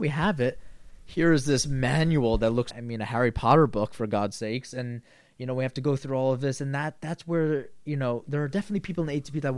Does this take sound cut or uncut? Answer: cut